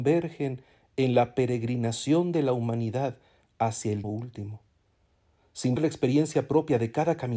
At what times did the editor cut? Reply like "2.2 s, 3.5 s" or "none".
4.0 s, 5.8 s